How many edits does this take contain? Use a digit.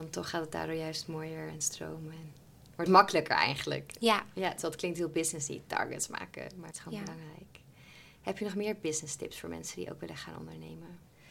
2